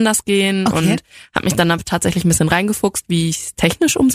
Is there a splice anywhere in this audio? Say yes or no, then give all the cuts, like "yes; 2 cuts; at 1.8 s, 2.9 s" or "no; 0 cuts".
no; 0 cuts